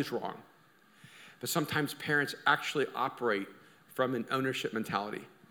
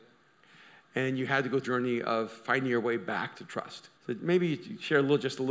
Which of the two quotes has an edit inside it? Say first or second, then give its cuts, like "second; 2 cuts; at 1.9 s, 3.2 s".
second; 2 cuts; at 1.6 s, 3.9 s